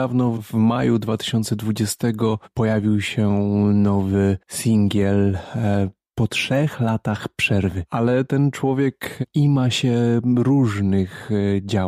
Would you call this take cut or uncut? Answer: cut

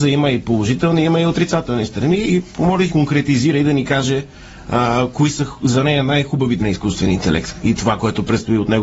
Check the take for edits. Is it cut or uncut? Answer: cut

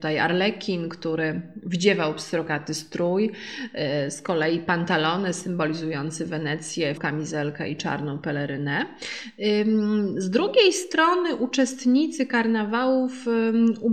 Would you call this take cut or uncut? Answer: cut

